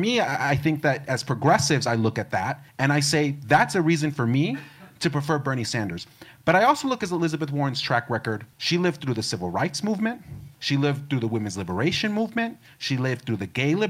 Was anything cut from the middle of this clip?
yes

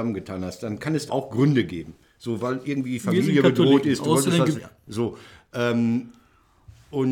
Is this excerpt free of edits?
no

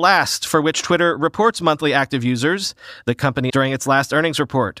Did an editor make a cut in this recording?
yes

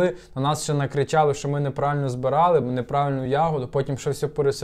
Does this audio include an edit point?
no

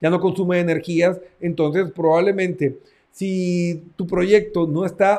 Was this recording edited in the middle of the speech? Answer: no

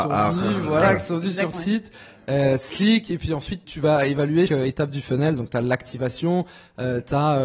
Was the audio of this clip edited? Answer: yes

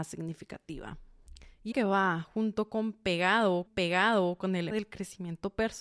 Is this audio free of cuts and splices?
no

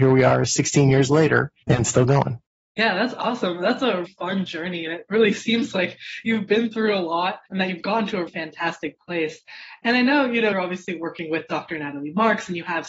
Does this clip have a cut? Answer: yes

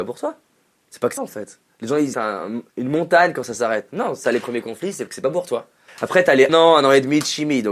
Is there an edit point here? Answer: yes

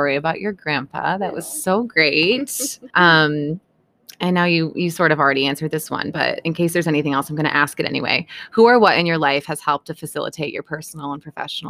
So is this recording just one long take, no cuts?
no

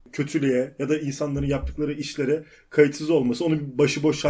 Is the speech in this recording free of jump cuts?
yes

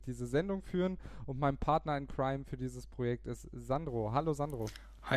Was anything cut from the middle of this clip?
no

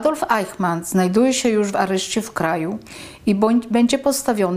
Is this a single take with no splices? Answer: yes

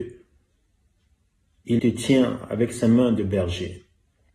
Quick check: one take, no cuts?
no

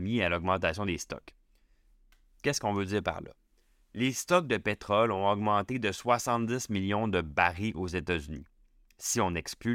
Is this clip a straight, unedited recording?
yes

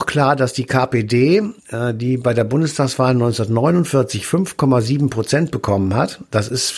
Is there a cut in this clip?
yes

